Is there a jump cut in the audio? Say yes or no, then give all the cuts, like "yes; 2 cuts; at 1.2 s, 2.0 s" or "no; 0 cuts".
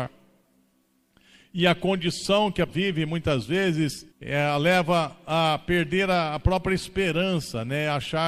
yes; 2 cuts; at 2.7 s, 4.1 s